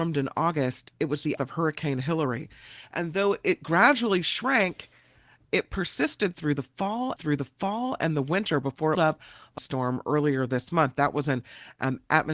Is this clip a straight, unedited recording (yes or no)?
no